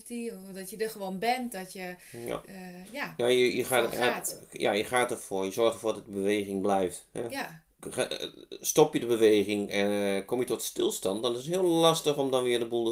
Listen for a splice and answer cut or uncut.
uncut